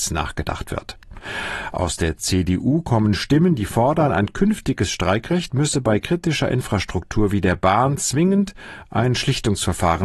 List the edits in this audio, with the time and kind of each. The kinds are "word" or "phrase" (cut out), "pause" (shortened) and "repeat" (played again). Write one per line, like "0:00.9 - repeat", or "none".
none